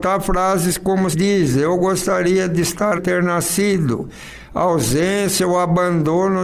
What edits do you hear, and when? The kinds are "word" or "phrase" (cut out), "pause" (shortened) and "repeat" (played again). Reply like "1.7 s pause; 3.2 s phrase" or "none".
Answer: 1.1 s word; 2.9 s phrase